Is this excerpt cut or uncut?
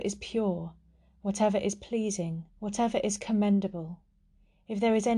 cut